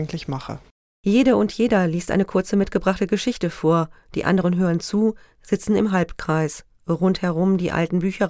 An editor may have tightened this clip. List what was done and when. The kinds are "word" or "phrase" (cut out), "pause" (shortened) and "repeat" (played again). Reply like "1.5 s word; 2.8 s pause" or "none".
none